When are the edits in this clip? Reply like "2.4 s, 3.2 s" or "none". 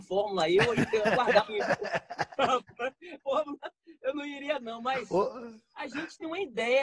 1.5 s, 3.2 s, 4.6 s